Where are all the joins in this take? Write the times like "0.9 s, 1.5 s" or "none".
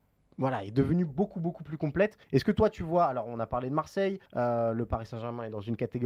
2.2 s, 4.3 s